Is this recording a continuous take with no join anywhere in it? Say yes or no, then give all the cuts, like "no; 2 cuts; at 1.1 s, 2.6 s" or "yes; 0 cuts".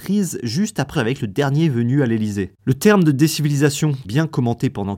no; 3 cuts; at 0.9 s, 2.6 s, 4.0 s